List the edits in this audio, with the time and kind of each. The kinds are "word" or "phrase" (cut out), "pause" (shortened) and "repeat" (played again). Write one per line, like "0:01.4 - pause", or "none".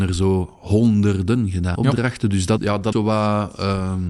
0:01.7 - word
0:02.6 - word
0:02.9 - word